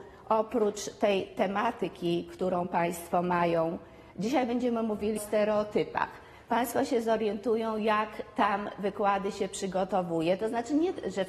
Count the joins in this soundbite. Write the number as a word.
one